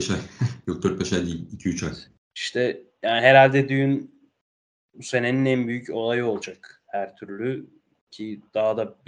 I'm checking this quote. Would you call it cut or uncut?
uncut